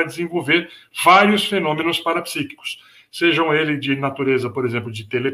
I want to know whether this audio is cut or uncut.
uncut